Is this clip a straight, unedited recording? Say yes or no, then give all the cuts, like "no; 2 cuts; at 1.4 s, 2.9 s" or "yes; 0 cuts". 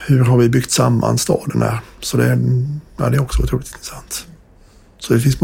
yes; 0 cuts